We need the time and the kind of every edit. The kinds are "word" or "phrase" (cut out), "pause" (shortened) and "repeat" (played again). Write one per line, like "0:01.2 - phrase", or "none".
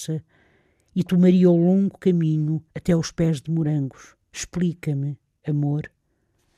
0:02.7 - pause
0:04.2 - pause